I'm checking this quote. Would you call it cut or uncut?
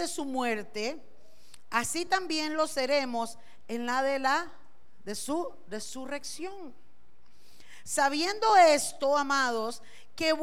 uncut